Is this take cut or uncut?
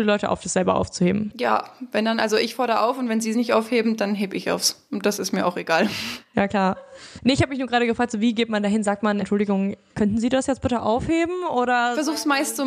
cut